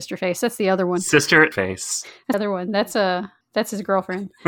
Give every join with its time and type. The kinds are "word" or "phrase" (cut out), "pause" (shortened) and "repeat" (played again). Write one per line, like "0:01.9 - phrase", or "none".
0:01.5 - word
0:02.3 - word
0:03.4 - pause